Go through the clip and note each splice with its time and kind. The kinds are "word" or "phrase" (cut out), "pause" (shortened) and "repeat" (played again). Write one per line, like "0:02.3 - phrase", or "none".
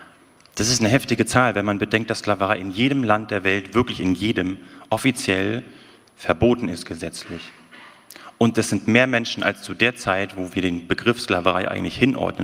none